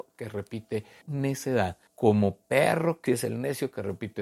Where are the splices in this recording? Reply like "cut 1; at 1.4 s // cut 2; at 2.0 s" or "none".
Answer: cut 1; at 1.0 s // cut 2; at 1.9 s // cut 3; at 3.1 s